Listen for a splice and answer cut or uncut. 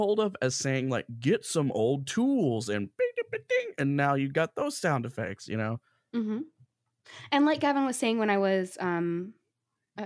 uncut